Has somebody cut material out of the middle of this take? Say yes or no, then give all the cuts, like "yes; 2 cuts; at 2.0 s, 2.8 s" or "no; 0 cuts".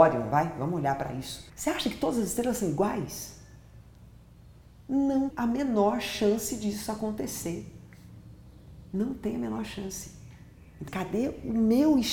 yes; 4 cuts; at 1.5 s, 5.3 s, 8.9 s, 10.9 s